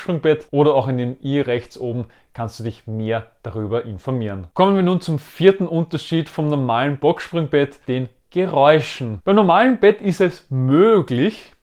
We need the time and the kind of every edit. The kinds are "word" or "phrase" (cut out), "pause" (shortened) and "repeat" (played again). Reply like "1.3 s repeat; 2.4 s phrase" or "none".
7.0 s phrase; 7.8 s word